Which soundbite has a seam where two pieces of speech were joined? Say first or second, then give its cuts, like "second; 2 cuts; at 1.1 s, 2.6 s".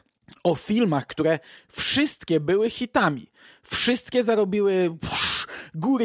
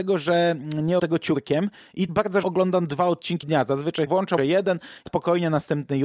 second; 7 cuts; at 1.0 s, 2.1 s, 2.4 s, 3.4 s, 4.1 s, 4.4 s, 5.1 s